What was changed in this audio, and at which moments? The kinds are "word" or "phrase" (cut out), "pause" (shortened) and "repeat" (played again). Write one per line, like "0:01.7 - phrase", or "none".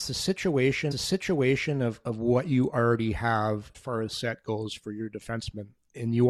0:00.9 - repeat
0:03.7 - word
0:04.1 - word